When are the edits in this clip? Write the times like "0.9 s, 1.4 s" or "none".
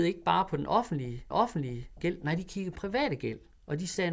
1.3 s, 2.8 s